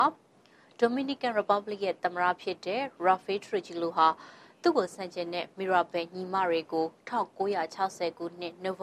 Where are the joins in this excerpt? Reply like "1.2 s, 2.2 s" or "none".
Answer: none